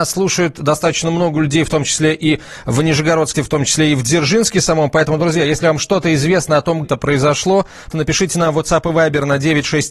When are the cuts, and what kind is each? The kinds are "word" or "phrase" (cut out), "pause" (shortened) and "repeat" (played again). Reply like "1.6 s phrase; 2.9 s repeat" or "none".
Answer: 3.3 s word; 6.8 s word; 7.9 s word